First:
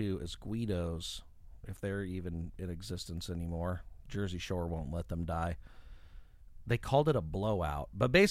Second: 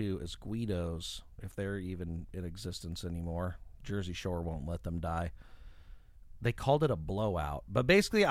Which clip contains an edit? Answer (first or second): second